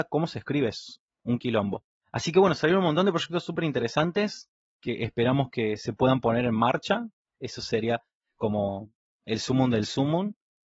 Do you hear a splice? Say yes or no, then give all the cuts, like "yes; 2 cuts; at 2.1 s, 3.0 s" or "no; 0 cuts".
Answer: no; 0 cuts